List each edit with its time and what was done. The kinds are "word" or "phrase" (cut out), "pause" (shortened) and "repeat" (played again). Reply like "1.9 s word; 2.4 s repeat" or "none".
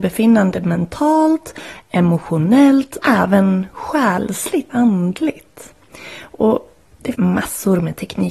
3.0 s word; 4.7 s word; 7.1 s word